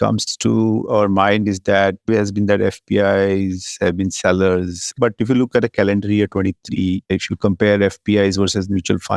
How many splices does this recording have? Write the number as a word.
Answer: two